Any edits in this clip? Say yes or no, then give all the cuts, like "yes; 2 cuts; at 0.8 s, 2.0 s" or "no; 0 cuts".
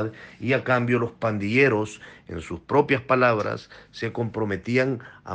no; 0 cuts